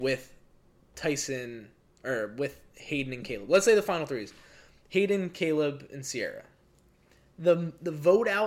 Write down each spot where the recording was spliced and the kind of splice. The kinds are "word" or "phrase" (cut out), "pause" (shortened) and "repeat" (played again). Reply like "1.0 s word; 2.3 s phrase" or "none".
none